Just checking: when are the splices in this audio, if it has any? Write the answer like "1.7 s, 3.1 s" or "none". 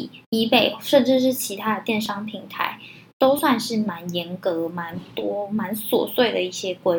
none